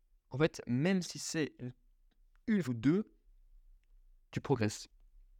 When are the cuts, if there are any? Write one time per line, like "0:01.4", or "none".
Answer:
0:02.6